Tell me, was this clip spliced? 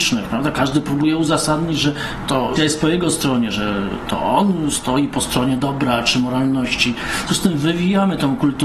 yes; 2 cuts; at 2.6 s, 7.3 s

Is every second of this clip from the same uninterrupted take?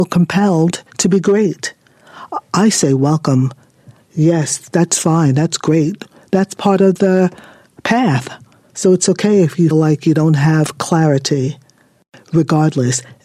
no; 1 cut; at 9.7 s

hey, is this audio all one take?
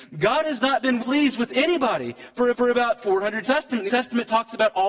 no; 4 cuts; at 1.0 s, 2.5 s, 3.4 s, 3.9 s

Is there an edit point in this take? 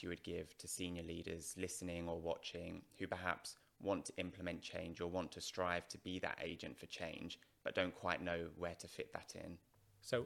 no; 0 cuts

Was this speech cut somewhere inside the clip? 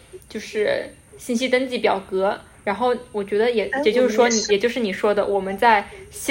yes; 1 cut; at 4.5 s

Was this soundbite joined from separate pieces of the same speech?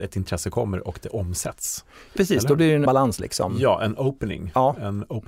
yes; 2 cuts; at 2.2 s, 2.9 s

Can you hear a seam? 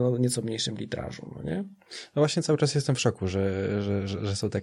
no; 0 cuts

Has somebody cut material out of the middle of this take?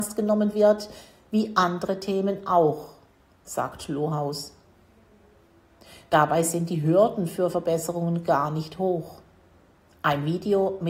no; 0 cuts

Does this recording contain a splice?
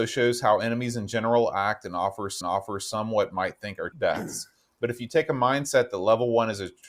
yes; 2 cuts; at 2.4 s, 3.9 s

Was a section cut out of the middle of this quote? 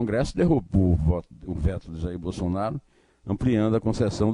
no; 0 cuts

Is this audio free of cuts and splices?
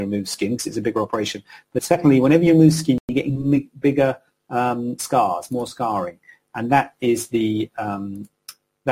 yes; 0 cuts

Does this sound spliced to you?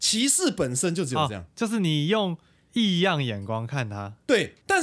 no; 0 cuts

